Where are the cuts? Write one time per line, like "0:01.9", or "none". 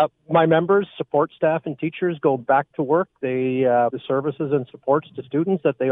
0:03.9